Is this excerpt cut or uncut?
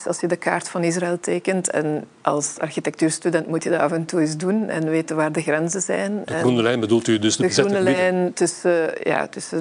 uncut